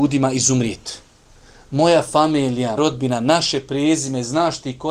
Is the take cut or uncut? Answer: cut